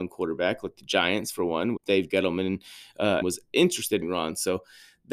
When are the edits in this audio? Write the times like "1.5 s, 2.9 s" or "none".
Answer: 1.8 s, 3.2 s, 4.0 s